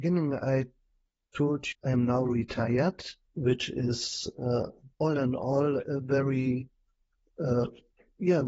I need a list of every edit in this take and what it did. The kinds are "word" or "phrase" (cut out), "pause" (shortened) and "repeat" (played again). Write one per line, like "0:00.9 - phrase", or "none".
0:01.7 - phrase
0:03.3 - pause
0:04.9 - pause